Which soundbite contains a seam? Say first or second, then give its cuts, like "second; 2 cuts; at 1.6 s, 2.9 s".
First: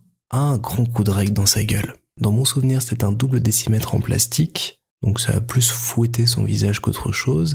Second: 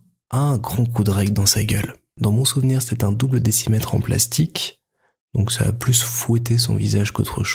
first; 1 cut; at 4.9 s